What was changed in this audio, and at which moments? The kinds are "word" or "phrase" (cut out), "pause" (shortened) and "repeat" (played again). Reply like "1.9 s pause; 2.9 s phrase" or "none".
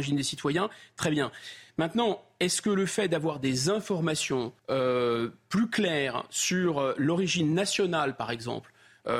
4.6 s pause